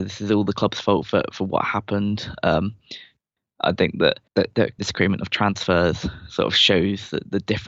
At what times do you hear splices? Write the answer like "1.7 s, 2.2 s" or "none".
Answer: 4.3 s, 4.8 s